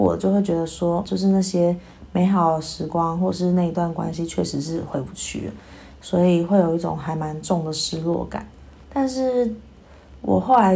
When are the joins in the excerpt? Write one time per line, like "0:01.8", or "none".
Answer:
0:01.0